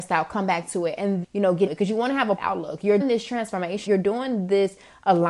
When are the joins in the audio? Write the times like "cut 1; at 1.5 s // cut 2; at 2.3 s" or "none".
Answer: cut 1; at 1.2 s // cut 2; at 1.7 s // cut 3; at 2.4 s // cut 4; at 3.0 s // cut 5; at 3.9 s